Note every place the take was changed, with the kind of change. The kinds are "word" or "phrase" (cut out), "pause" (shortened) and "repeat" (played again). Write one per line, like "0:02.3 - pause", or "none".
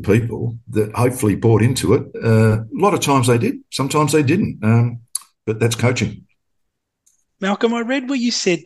none